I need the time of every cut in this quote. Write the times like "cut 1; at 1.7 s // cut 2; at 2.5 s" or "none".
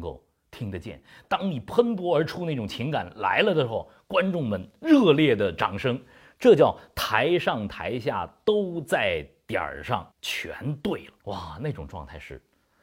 cut 1; at 10.1 s // cut 2; at 11.2 s